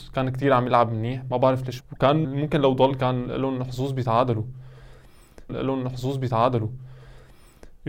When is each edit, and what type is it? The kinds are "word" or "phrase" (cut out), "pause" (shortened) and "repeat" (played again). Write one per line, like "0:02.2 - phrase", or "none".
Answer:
0:01.8 - word
0:02.2 - word
0:05.5 - repeat